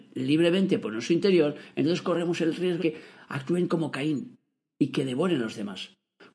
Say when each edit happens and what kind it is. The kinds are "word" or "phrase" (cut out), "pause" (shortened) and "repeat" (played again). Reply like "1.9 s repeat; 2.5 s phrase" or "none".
2.8 s word